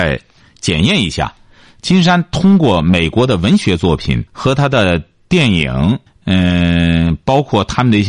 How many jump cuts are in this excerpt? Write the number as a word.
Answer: two